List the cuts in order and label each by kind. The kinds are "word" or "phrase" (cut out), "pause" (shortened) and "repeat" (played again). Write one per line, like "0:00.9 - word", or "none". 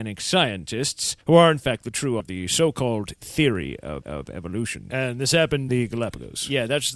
0:01.2 - pause
0:02.2 - word
0:04.0 - repeat
0:05.7 - word